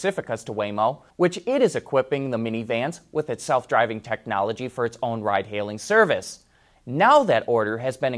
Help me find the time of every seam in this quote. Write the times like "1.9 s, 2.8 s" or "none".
1.1 s